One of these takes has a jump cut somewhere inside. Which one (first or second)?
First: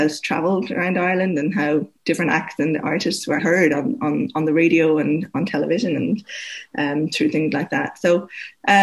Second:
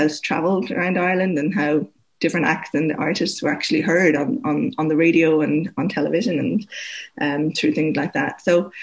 first